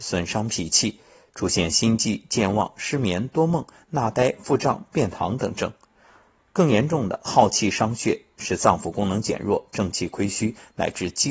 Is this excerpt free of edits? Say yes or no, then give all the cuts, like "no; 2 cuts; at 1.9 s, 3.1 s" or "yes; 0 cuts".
yes; 0 cuts